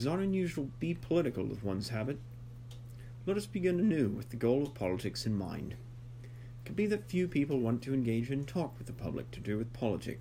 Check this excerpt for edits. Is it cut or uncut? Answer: uncut